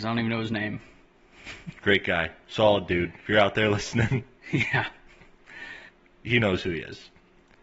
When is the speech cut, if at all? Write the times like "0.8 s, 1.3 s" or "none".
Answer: 3.2 s, 5.9 s